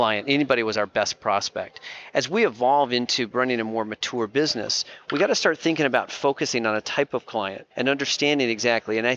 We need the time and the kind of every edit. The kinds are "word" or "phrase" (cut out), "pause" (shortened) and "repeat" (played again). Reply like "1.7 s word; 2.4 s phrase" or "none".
7.7 s pause